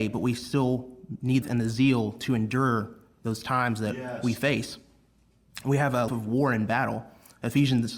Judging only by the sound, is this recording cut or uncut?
cut